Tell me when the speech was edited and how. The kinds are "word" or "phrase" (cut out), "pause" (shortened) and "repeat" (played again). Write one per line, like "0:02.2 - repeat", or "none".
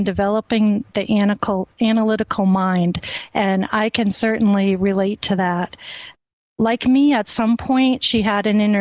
none

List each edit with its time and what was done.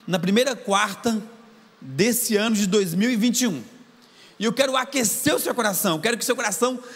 none

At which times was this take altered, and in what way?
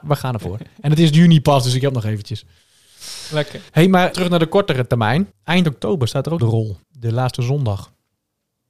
0:03.7 - pause
0:04.1 - word
0:05.3 - pause
0:06.4 - phrase
0:06.8 - pause

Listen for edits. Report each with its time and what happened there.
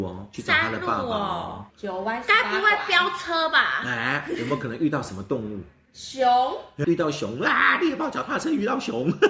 0:01.7 - pause
0:06.8 - word

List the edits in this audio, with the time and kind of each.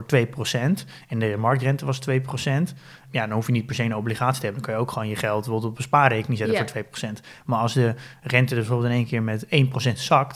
none

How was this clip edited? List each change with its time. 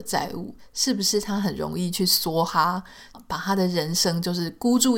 0:03.1 - phrase

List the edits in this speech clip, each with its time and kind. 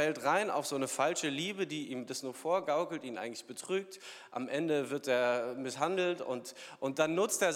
none

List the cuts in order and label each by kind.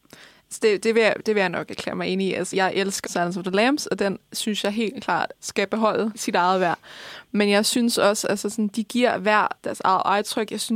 0:02.5 - word
0:03.0 - word
0:06.1 - word
0:09.6 - word

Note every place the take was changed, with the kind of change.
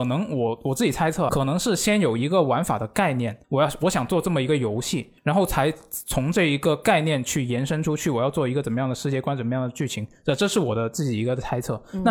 0:01.3 - phrase
0:03.4 - pause
0:05.2 - pause

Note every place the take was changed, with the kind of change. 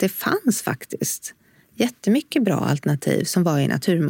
none

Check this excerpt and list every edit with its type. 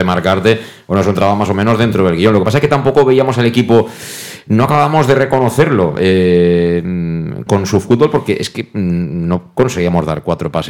0:07.5 - word

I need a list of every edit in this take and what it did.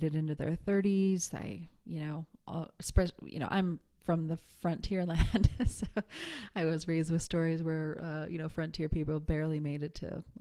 none

